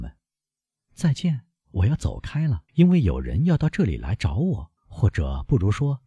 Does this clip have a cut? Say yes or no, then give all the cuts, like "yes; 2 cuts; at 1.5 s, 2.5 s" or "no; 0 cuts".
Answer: yes; 2 cuts; at 2.7 s, 4.8 s